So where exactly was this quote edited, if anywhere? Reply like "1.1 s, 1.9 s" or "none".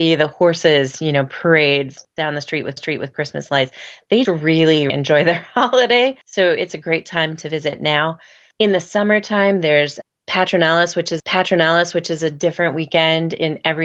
2.8 s, 4.2 s, 4.9 s, 6.2 s, 11.2 s